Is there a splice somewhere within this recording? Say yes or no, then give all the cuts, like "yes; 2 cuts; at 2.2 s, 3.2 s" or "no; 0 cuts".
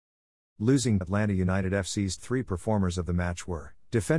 yes; 2 cuts; at 1.0 s, 2.2 s